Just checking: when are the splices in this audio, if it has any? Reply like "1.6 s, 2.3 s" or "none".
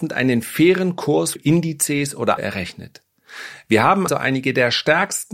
1.4 s, 2.4 s, 4.1 s